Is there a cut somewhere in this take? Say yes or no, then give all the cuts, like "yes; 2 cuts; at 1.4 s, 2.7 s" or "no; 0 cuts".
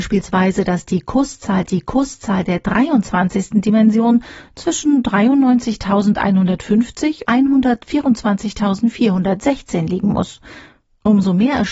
yes; 2 cuts; at 1.6 s, 7.2 s